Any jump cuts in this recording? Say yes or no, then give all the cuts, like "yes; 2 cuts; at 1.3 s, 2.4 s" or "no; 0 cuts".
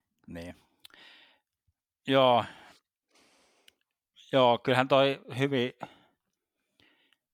no; 0 cuts